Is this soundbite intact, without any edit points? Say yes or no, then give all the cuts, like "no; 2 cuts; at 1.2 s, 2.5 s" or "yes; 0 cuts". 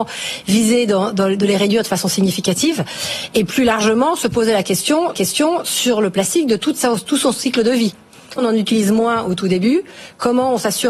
no; 3 cuts; at 1.1 s, 5.1 s, 8.4 s